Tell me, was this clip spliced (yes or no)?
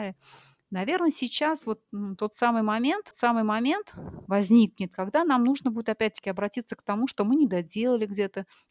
yes